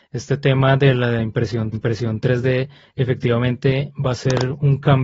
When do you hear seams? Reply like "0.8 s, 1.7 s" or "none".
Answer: 1.7 s